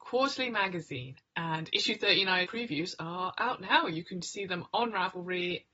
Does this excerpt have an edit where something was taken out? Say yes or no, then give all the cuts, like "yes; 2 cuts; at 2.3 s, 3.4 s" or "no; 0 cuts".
no; 0 cuts